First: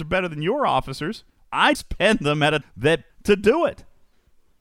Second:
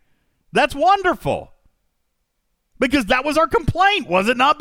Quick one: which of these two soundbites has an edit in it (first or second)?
first